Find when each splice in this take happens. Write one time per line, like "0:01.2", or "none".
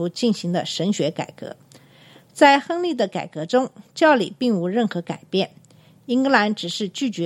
0:03.9